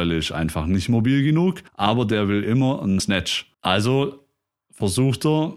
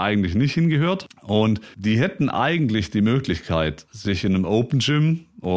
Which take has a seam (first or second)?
first